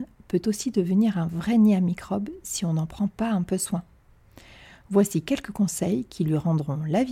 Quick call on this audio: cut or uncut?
uncut